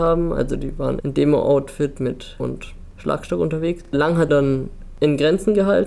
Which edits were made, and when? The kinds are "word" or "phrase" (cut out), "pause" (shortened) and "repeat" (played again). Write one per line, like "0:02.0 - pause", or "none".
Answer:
0:01.0 - word
0:02.4 - word
0:03.9 - pause
0:04.3 - phrase